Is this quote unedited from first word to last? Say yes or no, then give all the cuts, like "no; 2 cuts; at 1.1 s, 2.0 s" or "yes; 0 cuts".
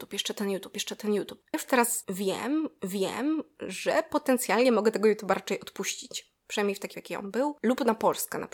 no; 3 cuts; at 1.5 s, 2.8 s, 6.9 s